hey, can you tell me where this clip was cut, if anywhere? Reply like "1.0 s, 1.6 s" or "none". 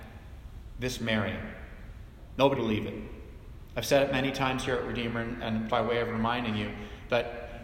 2.5 s, 5.7 s